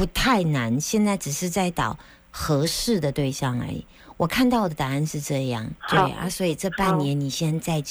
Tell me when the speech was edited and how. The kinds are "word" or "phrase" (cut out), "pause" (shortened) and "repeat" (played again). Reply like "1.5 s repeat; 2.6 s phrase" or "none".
5.8 s pause